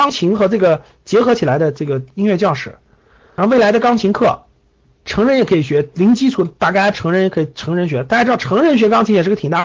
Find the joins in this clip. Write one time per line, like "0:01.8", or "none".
0:06.9